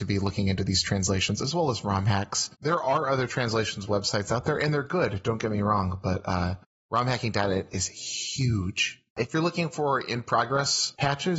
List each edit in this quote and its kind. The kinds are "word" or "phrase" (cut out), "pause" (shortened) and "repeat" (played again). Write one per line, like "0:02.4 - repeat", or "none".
0:02.5 - pause
0:06.7 - pause
0:09.1 - pause

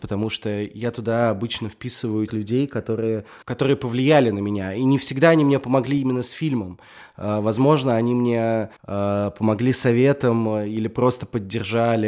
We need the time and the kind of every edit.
0:02.3 - word
0:03.4 - pause
0:08.8 - pause

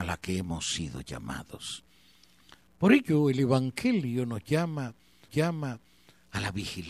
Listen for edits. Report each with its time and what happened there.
0:05.3 - repeat

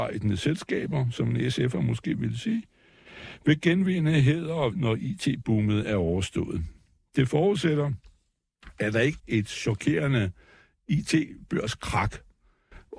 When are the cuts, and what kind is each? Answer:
0:04.7 - word
0:09.2 - word

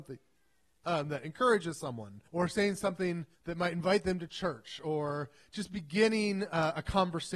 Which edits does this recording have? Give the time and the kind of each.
0:02.3 - pause
0:03.3 - pause

